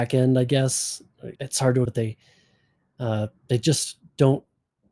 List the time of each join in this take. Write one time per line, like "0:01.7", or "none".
0:01.4
0:01.9